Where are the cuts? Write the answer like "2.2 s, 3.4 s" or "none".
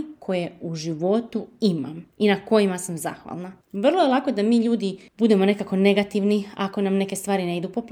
2.1 s, 3.6 s, 5.1 s